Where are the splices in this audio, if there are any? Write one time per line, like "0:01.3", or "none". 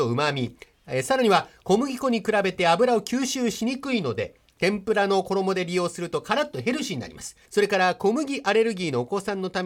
0:07.5